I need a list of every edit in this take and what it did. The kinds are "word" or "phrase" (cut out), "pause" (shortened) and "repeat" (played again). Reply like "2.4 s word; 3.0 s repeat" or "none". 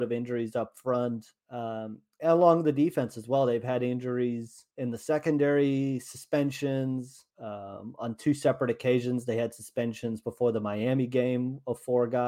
1.4 s pause; 4.7 s pause; 7.3 s pause